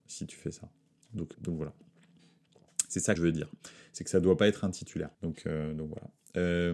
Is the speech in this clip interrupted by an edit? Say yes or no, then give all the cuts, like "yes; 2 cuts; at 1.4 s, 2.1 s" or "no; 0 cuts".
yes; 3 cuts; at 1.3 s, 3.2 s, 5.1 s